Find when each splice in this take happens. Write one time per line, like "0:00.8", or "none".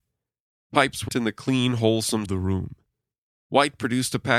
0:01.1
0:02.3